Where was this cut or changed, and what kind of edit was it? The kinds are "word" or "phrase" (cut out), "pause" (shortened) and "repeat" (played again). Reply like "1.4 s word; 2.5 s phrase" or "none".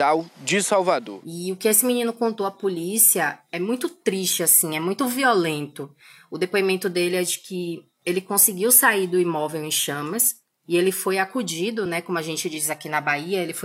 none